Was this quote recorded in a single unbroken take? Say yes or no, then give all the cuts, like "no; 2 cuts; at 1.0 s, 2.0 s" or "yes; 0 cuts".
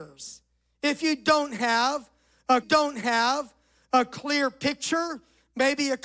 no; 1 cut; at 2.6 s